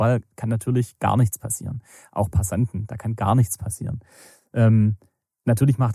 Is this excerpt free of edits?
yes; 0 cuts

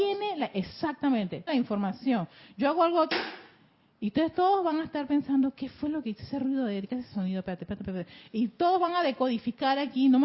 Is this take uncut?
no; 2 cuts; at 1.5 s, 7.8 s

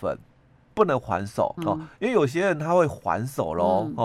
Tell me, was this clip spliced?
yes; 1 cut; at 1.6 s

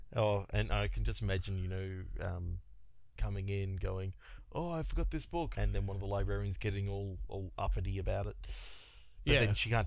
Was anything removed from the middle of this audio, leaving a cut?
yes; 2 cuts; at 3.2 s, 5.5 s

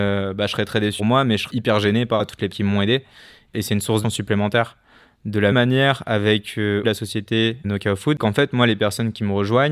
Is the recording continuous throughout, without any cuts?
no; 9 cuts; at 1.0 s, 1.5 s, 2.2 s, 2.5 s, 4.0 s, 5.5 s, 6.8 s, 7.6 s, 8.2 s

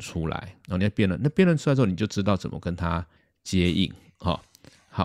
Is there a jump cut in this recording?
yes; 1 cut; at 3.2 s

